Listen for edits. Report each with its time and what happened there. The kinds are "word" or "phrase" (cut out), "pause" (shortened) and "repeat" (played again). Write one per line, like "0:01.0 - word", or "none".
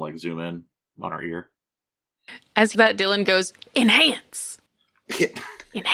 0:02.7 - word
0:04.7 - pause